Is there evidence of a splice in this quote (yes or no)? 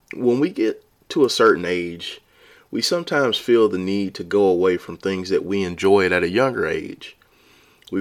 no